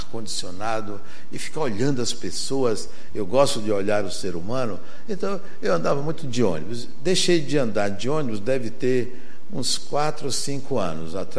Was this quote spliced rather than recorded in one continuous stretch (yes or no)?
no